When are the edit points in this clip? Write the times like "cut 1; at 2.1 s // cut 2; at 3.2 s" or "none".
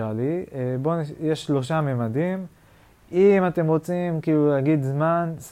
none